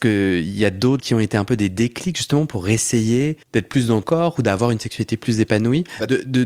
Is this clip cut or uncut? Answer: cut